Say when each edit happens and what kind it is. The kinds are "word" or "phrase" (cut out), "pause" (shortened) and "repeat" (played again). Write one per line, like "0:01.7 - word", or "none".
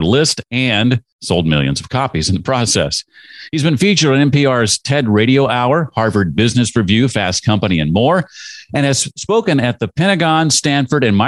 none